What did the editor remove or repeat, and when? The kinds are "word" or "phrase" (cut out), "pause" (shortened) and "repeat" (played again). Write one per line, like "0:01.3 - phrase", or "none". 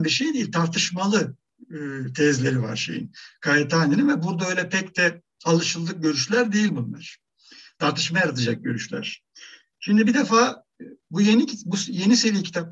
none